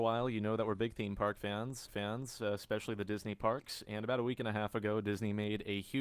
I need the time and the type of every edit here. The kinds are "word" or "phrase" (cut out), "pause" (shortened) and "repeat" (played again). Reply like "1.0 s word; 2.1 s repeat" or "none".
1.9 s repeat